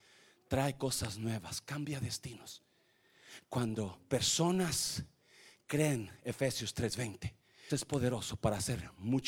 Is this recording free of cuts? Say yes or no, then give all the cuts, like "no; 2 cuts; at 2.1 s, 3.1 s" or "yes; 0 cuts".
no; 1 cut; at 7.7 s